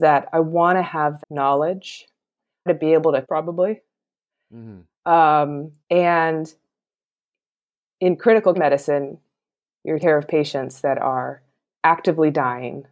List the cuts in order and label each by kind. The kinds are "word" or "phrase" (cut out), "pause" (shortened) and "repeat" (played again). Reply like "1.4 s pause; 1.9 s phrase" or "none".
1.2 s word; 2.7 s phrase; 3.2 s phrase; 5.8 s pause; 8.5 s word; 10.0 s word